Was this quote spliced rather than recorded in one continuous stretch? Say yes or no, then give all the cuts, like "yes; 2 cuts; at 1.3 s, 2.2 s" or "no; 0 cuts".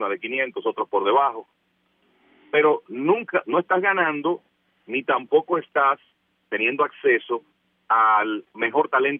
no; 0 cuts